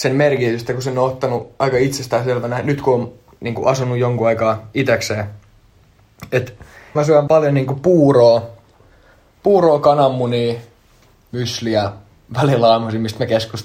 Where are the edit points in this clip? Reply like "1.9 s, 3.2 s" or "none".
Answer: 6.9 s, 7.3 s